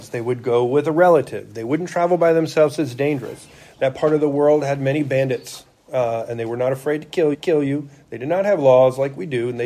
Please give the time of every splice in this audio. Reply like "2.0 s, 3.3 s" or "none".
7.3 s